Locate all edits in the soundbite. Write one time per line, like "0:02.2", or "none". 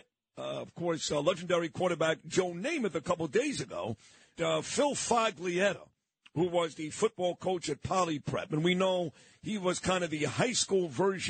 0:04.3